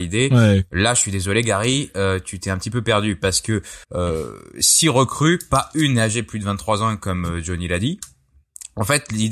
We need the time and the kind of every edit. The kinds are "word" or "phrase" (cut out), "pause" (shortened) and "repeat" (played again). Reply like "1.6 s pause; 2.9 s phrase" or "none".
3.8 s pause